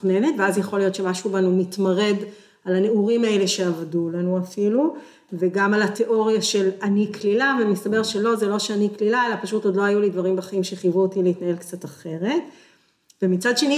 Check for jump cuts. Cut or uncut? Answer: uncut